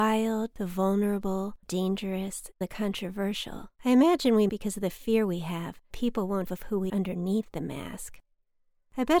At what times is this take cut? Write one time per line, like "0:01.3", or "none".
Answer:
0:01.6
0:02.6
0:03.7
0:04.5
0:05.9
0:06.5
0:06.9